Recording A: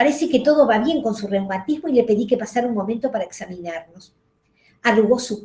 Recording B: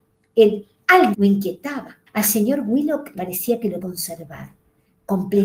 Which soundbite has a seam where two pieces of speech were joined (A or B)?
B